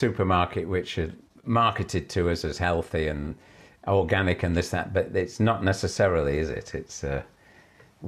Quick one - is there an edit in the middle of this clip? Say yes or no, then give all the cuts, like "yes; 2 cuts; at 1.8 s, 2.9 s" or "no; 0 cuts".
yes; 1 cut; at 1.4 s